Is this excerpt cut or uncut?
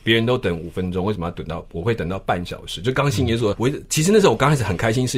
cut